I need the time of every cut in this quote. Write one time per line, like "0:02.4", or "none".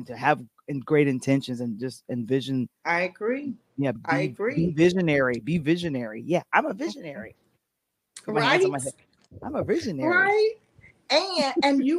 0:04.0